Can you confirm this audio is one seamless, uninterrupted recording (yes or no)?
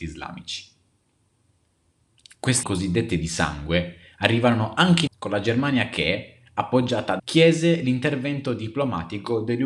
no